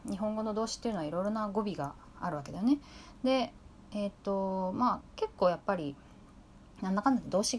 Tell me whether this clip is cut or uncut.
uncut